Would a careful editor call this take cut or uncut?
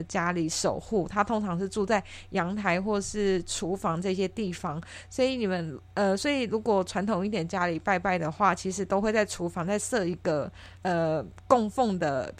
cut